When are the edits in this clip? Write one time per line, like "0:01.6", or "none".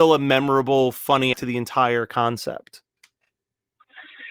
0:01.3

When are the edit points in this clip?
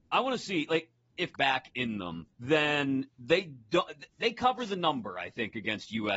0:01.3
0:02.3

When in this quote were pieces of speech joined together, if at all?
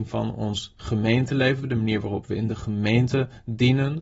none

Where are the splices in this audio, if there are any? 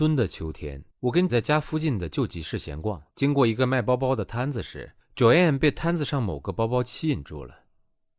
0:00.9
0:01.3
0:03.1
0:05.0

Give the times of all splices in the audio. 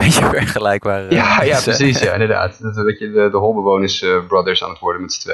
none

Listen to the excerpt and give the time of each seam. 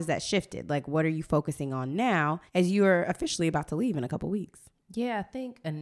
0:02.5

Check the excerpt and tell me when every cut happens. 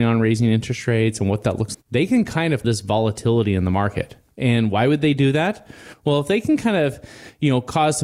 0:01.7
0:02.6

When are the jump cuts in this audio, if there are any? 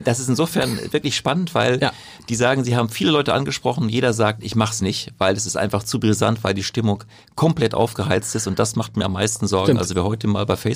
none

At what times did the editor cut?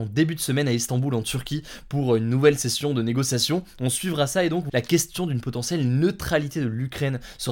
0:04.7

